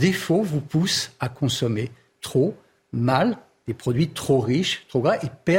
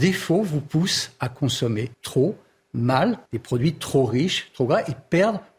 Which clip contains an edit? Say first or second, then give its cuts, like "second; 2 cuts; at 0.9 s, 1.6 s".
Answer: second; 2 cuts; at 1.9 s, 3.3 s